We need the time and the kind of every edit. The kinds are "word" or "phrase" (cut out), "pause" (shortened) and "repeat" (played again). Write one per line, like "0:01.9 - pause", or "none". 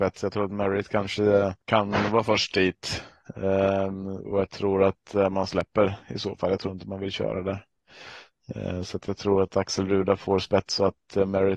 0:01.6 - pause